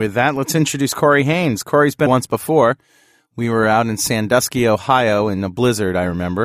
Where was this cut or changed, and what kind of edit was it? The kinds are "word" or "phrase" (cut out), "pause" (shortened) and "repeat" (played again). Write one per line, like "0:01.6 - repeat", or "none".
0:02.1 - phrase